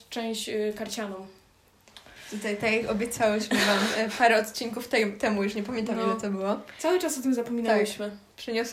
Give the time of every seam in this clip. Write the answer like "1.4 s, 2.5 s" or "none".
none